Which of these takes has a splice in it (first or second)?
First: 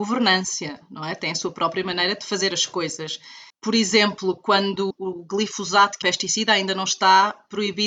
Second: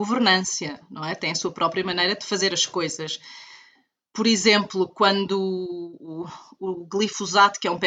first